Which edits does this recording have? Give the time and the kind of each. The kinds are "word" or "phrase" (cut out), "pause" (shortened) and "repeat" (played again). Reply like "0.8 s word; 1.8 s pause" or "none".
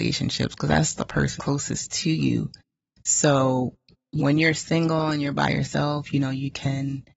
1.4 s word; 4.2 s word